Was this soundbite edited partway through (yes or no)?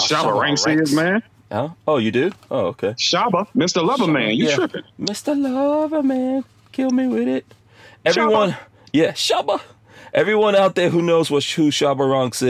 no